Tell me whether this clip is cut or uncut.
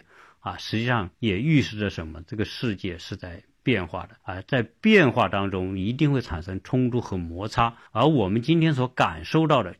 cut